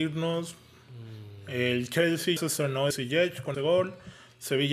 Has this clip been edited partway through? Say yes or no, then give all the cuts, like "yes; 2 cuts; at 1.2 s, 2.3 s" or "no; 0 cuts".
yes; 3 cuts; at 2.4 s, 2.9 s, 3.5 s